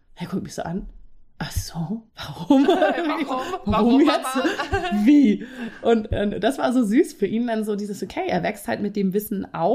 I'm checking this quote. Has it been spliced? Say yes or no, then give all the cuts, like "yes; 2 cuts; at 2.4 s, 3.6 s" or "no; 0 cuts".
yes; 1 cut; at 2.1 s